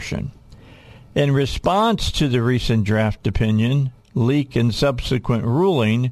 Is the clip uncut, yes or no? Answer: yes